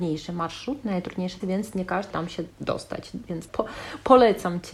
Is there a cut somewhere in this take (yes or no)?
yes